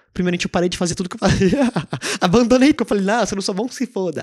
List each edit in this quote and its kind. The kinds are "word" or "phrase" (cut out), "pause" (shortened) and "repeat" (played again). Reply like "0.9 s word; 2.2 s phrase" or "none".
2.7 s word